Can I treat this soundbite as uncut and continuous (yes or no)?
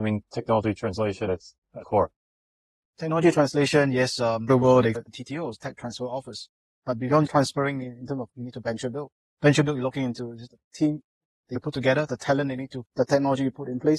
no